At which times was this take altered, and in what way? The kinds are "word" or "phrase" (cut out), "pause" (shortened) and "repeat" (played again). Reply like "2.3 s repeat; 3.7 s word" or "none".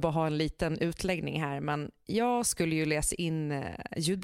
none